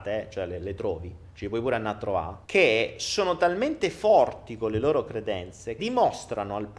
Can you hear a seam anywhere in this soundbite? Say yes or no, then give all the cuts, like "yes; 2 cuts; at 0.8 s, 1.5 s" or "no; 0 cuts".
yes; 3 cuts; at 1.3 s, 2.4 s, 5.8 s